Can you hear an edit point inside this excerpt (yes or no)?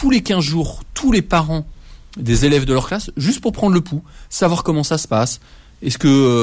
no